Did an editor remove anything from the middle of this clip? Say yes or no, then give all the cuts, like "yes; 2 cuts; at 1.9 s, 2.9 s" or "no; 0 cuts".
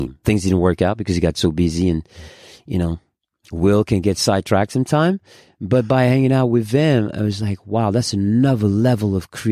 no; 0 cuts